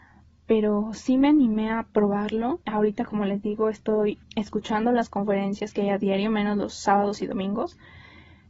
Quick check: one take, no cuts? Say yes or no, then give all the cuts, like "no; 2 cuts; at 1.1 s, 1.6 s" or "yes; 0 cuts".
no; 2 cuts; at 2.6 s, 4.2 s